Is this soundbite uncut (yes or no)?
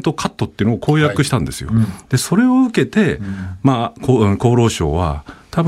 yes